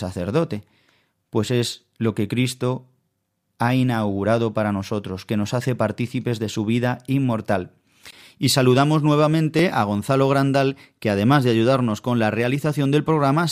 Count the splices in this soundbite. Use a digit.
0